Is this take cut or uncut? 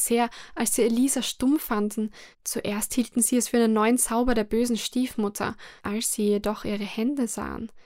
cut